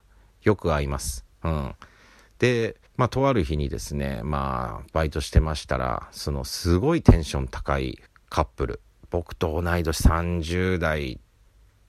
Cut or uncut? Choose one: cut